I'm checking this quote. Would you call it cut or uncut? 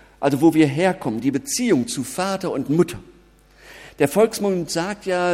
uncut